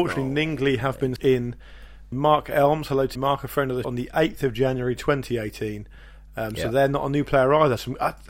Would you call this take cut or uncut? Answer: cut